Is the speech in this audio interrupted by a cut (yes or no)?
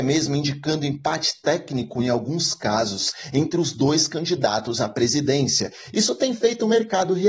no